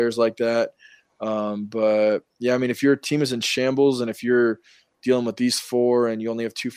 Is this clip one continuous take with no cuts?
yes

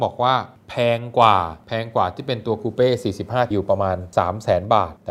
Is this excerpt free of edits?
no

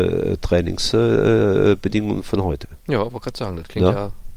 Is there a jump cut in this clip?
no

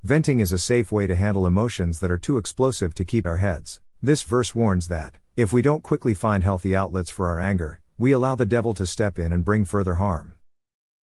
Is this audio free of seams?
no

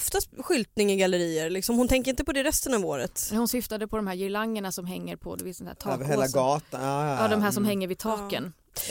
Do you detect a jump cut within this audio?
no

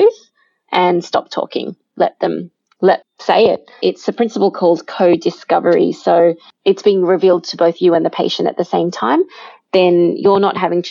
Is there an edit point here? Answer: yes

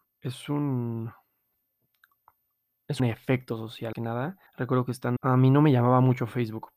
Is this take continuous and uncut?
no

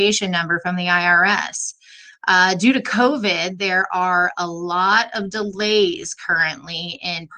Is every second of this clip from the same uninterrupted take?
yes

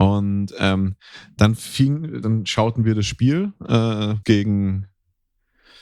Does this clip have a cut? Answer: yes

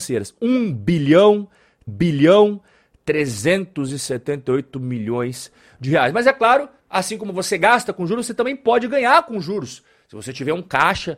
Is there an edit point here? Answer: yes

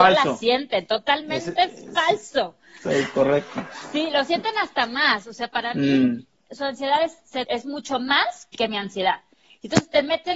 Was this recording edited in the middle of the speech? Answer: yes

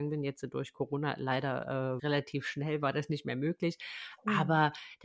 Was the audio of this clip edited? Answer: yes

